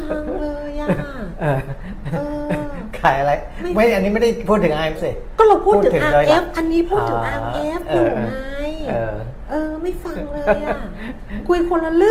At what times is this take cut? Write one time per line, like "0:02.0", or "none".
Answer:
0:04.9